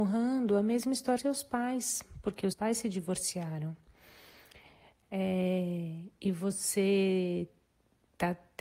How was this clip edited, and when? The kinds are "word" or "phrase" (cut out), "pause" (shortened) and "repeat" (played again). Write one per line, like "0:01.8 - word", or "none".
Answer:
0:01.2 - word
0:02.5 - word